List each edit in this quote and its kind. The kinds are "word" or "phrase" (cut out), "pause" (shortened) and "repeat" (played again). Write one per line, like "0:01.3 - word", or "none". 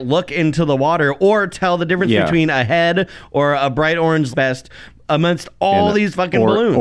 0:04.3 - word